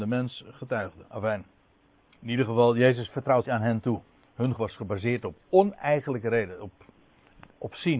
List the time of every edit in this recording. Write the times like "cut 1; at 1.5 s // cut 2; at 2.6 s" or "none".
cut 1; at 1.1 s // cut 2; at 3.4 s // cut 3; at 4.6 s